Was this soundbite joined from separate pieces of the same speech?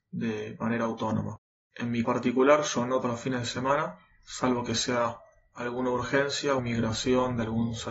yes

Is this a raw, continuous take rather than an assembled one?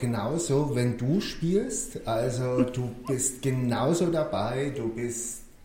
yes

